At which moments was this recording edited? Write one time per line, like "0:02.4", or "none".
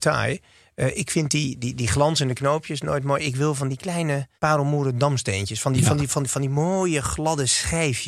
0:04.4